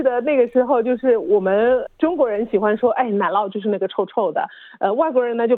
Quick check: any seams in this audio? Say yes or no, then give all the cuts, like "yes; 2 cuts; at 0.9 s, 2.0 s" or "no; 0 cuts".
no; 0 cuts